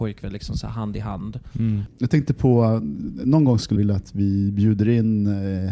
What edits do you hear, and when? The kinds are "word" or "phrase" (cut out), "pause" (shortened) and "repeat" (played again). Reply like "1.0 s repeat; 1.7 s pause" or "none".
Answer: 3.8 s word